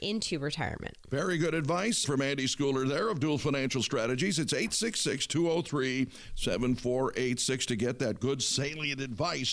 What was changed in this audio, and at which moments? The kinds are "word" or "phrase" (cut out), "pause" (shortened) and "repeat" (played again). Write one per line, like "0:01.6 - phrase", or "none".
0:02.0 - word